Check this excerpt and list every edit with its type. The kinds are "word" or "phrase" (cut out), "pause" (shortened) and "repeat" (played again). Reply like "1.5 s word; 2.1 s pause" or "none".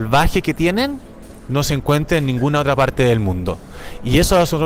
none